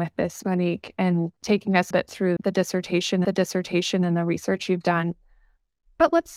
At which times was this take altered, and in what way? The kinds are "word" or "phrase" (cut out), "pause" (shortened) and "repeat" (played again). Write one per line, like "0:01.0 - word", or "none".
0:01.4 - pause
0:01.9 - phrase
0:02.4 - word
0:03.2 - repeat